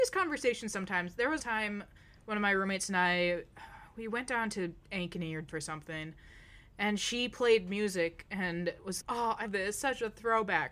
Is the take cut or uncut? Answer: cut